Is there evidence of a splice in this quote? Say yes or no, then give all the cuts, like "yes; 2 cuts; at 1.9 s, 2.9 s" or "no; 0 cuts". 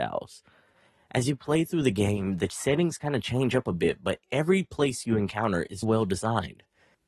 yes; 1 cut; at 5.8 s